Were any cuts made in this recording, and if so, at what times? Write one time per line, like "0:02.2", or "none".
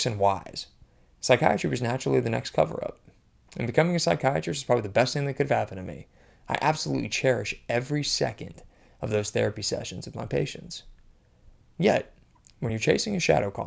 none